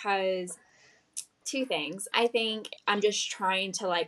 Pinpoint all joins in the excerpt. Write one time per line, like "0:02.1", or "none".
0:01.4
0:02.1
0:02.8